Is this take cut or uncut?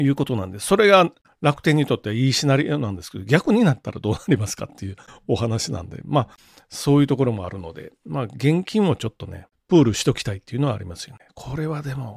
uncut